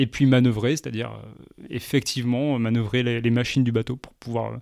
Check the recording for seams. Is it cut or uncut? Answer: uncut